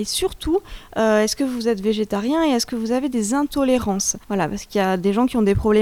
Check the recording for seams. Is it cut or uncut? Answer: cut